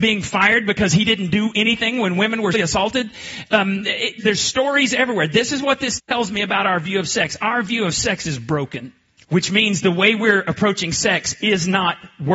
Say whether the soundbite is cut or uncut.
cut